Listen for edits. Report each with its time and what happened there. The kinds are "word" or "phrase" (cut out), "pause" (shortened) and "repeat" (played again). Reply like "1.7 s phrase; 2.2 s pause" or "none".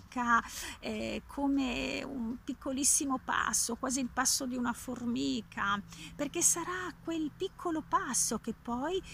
none